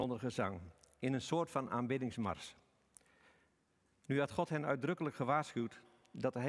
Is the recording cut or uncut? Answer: uncut